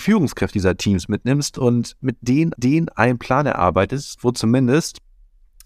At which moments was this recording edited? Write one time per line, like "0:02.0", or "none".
0:02.5